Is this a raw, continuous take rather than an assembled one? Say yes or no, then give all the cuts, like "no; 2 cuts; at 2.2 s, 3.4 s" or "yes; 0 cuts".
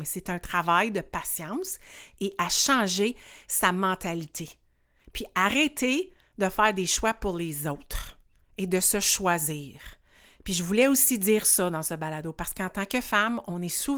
yes; 0 cuts